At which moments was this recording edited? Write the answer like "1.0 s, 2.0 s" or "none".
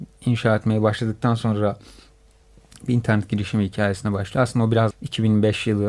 4.9 s